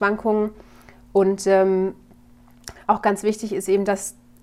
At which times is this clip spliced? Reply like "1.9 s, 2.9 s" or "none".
none